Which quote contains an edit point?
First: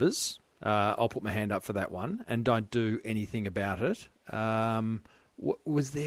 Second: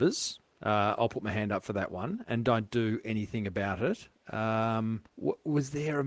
second; 1 cut; at 5.1 s

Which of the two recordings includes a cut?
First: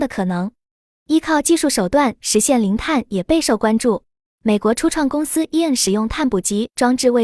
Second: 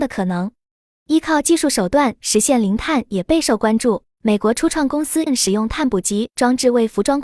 second; 2 cuts; at 4.1 s, 5.3 s

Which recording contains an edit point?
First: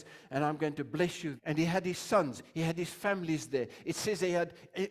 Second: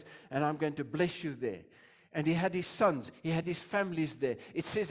first; 1 cut; at 1.4 s

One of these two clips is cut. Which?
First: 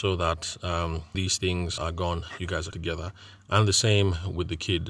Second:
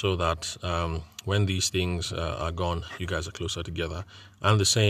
first; 3 cuts; at 1.1 s, 1.8 s, 2.7 s

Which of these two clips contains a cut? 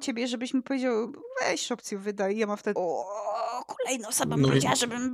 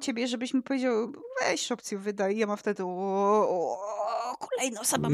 first; 1 cut; at 2.8 s

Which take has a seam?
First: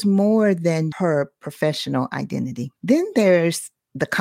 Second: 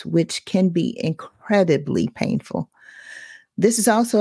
first; 2 cuts; at 0.9 s, 2.8 s

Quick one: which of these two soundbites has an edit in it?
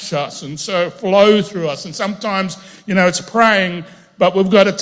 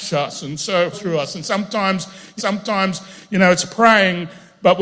second; 2 cuts; at 0.9 s, 2.4 s

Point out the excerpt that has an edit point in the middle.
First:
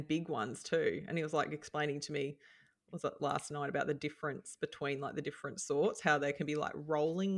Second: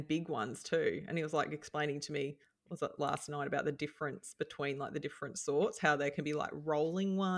second; 1 cut; at 2.4 s

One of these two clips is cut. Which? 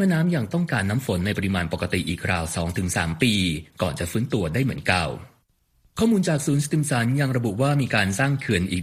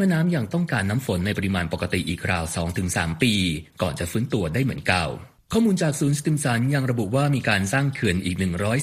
second; 1 cut; at 5.4 s

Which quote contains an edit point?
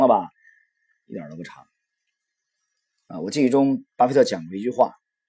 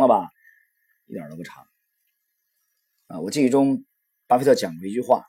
first; 1 cut; at 3.9 s

